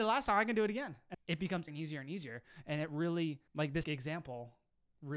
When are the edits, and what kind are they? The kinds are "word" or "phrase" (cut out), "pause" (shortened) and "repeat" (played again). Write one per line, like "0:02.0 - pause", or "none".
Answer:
0:01.1 - word
0:01.7 - word
0:03.5 - pause
0:03.8 - word